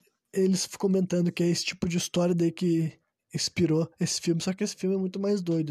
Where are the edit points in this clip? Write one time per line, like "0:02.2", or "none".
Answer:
none